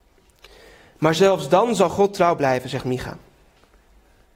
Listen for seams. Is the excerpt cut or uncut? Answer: uncut